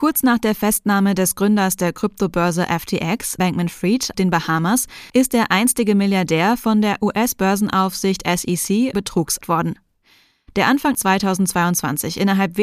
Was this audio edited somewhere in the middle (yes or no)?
yes